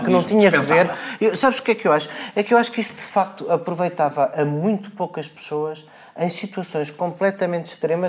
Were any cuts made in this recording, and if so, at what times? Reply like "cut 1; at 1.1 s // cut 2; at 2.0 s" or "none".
none